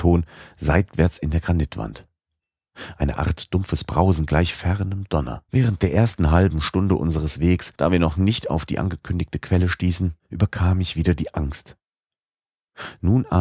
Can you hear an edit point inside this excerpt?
yes; 3 cuts; at 5.5 s, 7.8 s, 10.2 s

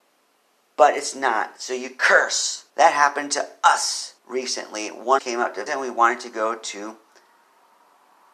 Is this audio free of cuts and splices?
no; 4 cuts; at 2.7 s, 4.2 s, 5.2 s, 5.7 s

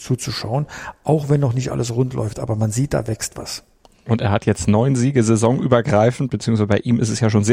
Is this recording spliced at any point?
no; 0 cuts

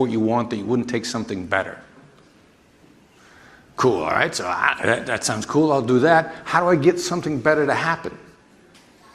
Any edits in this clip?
no; 0 cuts

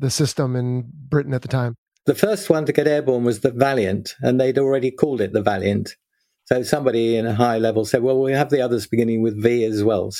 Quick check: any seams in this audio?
no; 0 cuts

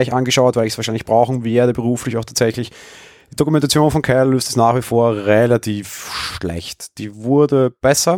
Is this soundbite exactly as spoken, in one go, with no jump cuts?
yes; 0 cuts

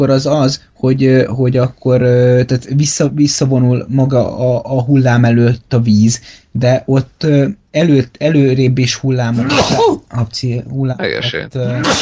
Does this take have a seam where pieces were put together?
no; 0 cuts

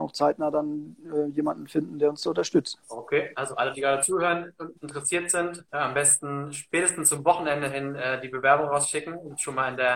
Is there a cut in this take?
yes; 3 cuts; at 2.8 s, 4.8 s, 5.7 s

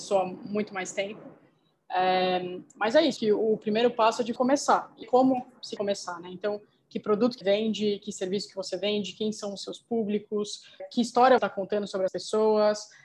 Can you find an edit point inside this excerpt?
yes; 8 cuts; at 3.2 s, 4.4 s, 5.0 s, 5.8 s, 7.4 s, 10.8 s, 11.4 s, 12.1 s

